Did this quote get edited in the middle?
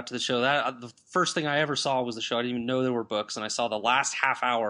no; 0 cuts

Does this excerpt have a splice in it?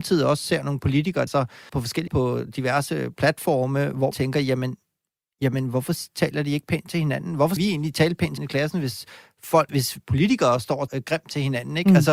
yes; 8 cuts; at 1.3 s, 1.7 s, 2.1 s, 4.1 s, 7.6 s, 8.4 s, 9.7 s, 10.9 s

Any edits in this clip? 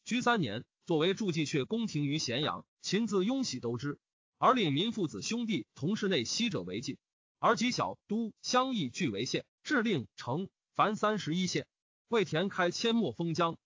no; 0 cuts

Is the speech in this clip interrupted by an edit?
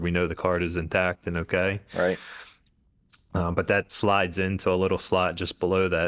no; 0 cuts

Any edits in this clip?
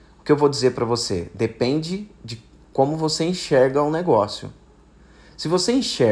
no; 0 cuts

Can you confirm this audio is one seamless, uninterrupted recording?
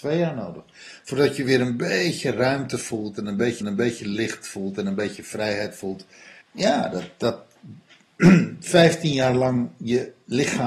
no; 2 cuts; at 3.6 s, 6.4 s

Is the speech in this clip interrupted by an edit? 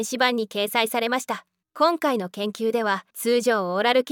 yes; 2 cuts; at 1.6 s, 3.1 s

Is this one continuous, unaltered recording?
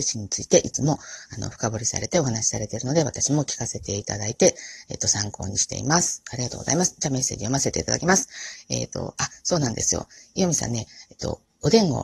yes; 0 cuts

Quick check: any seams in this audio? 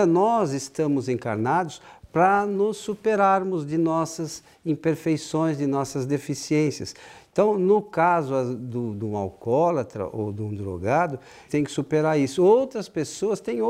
yes; 1 cut; at 11.5 s

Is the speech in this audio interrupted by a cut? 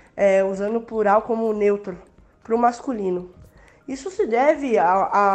no; 0 cuts

